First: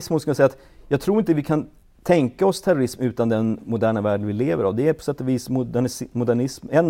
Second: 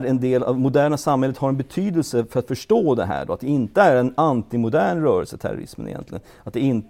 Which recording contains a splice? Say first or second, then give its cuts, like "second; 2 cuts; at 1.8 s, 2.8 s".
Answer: first; 1 cut; at 1.8 s